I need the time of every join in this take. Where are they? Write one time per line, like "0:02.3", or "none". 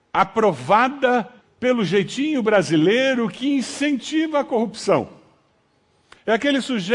0:01.4

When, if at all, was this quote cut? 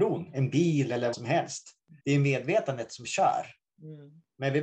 0:01.1
0:02.0

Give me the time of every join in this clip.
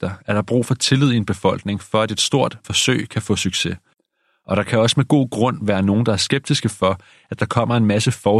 0:02.6

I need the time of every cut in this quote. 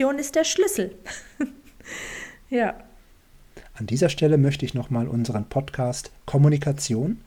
none

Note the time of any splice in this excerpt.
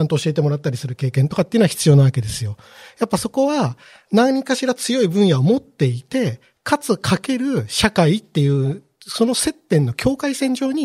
none

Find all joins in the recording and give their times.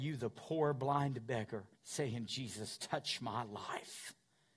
0:01.8
0:02.8

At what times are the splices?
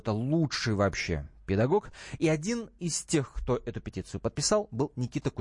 none

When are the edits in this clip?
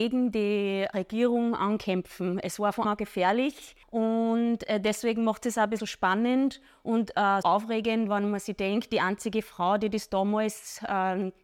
0:02.8
0:03.8
0:05.8
0:07.4

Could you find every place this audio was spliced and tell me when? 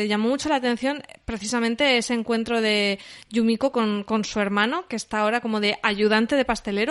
none

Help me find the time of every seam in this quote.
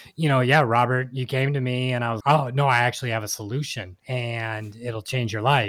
0:02.2
0:04.0

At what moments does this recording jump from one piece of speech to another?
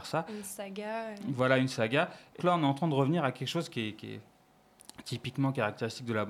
0:02.4

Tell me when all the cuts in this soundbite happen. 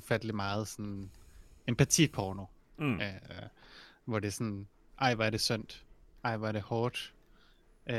none

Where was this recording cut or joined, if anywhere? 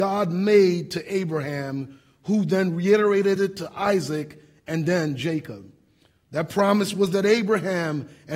none

